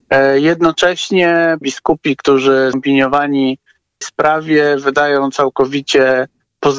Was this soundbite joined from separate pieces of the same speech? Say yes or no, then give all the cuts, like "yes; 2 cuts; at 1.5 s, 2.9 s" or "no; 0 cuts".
yes; 3 cuts; at 1.6 s, 2.7 s, 4.0 s